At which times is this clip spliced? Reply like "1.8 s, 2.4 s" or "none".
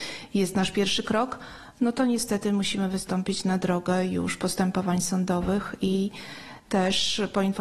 none